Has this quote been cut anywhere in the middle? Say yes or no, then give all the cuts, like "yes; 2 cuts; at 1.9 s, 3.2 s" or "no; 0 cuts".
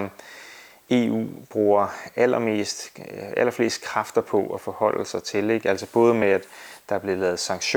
no; 0 cuts